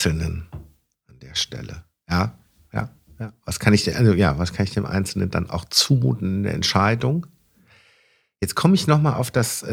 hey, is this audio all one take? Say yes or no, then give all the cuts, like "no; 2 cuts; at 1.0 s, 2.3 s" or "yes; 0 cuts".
yes; 0 cuts